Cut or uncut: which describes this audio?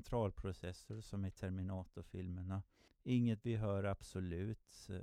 cut